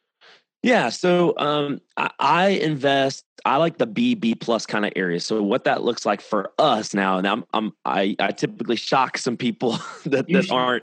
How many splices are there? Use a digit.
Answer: 0